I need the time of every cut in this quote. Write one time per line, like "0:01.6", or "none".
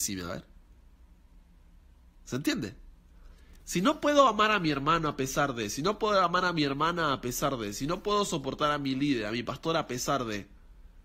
none